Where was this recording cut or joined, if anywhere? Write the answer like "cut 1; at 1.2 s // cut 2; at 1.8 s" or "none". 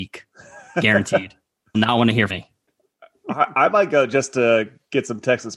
cut 1; at 1.7 s // cut 2; at 2.3 s